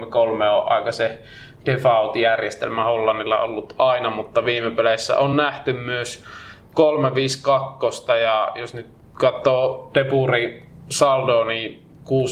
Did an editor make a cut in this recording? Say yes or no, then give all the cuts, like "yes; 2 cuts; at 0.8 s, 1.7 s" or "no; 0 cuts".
no; 0 cuts